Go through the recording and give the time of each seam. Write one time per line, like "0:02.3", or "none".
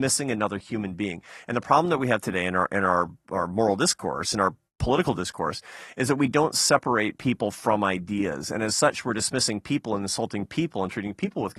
none